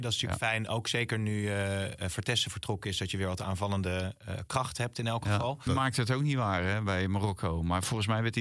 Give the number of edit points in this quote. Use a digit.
1